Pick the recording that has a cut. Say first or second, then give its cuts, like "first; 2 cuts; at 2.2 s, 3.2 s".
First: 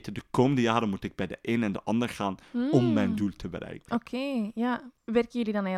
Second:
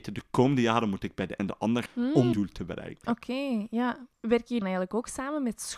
second; 4 cuts; at 1.4 s, 1.9 s, 2.3 s, 4.6 s